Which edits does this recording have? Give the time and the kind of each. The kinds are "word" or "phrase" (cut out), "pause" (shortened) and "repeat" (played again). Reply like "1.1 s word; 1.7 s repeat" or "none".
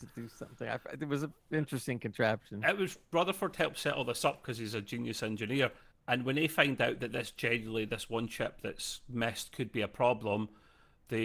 5.9 s pause